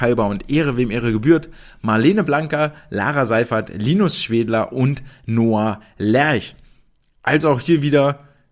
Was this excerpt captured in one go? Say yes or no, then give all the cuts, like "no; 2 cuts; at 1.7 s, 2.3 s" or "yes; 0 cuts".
yes; 0 cuts